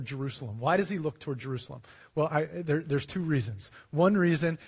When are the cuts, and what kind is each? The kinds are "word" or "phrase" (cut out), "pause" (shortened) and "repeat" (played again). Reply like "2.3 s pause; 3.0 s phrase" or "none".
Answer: none